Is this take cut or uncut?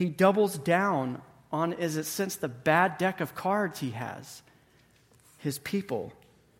uncut